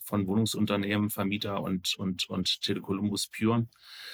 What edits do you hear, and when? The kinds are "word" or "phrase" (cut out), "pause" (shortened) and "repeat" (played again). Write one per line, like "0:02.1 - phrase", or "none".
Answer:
none

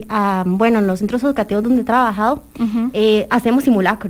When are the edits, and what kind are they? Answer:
none

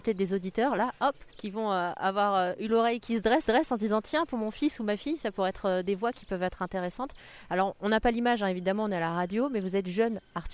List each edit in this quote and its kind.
0:01.3 - pause
0:03.5 - repeat

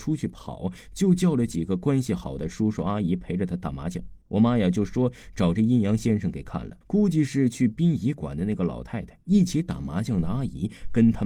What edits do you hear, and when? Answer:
0:04.2 - pause
0:06.8 - pause
0:09.2 - pause

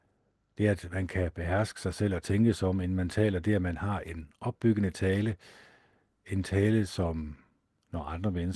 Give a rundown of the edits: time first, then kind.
none

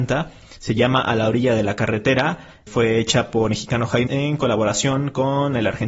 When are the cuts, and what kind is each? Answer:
0:02.7 - word
0:03.5 - word
0:04.1 - word

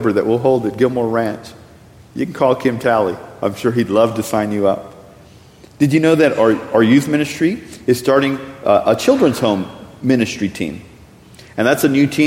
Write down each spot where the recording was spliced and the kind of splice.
none

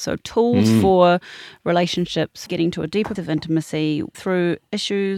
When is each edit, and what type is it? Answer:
0:02.5 - word
0:03.2 - word
0:04.1 - word

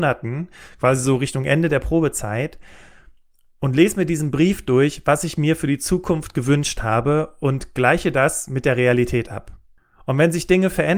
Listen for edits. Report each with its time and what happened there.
none

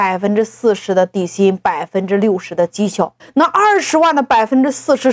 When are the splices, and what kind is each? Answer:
0:03.2 - pause

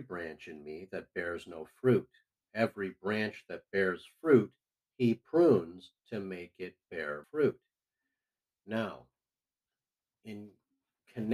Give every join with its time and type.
0:06.0 - pause
0:07.2 - word

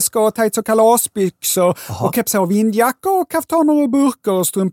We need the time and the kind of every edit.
none

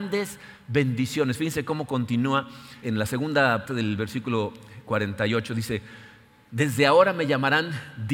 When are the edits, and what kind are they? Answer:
0:02.8 - word
0:03.7 - word

